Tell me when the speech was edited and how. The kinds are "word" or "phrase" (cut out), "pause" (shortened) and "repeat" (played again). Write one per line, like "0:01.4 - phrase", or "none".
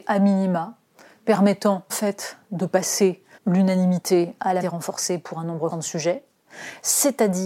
0:01.9 - word
0:03.3 - word
0:04.6 - word
0:05.7 - word